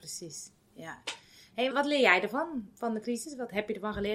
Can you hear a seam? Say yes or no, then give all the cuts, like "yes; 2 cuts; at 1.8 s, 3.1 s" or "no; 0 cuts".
yes; 1 cut; at 1.7 s